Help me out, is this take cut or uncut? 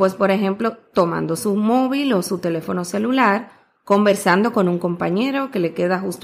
uncut